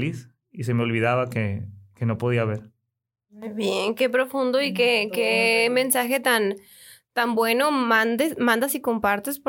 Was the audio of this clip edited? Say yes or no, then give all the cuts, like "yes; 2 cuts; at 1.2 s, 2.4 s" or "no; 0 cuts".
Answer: no; 0 cuts